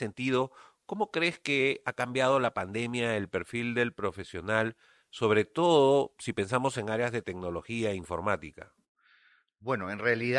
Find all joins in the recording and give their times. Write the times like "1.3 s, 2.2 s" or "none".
none